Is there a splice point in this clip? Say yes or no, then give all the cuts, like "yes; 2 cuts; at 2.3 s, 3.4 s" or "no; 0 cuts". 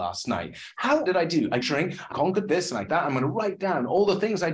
yes; 4 cuts; at 1.1 s, 1.6 s, 2.1 s, 2.9 s